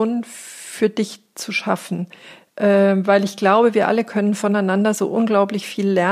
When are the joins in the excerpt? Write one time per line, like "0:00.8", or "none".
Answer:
none